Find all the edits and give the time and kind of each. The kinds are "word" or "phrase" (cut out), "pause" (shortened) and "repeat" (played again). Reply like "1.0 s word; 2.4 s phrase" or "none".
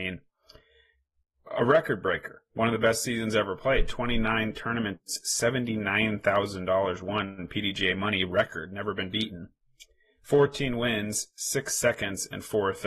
none